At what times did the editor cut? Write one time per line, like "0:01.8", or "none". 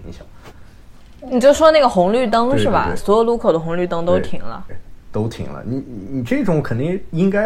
0:04.7